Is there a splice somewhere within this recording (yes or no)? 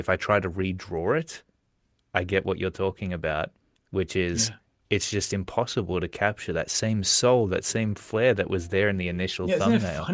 no